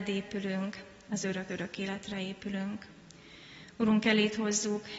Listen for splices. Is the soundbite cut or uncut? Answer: cut